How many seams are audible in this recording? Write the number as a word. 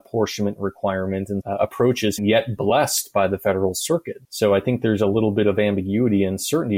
four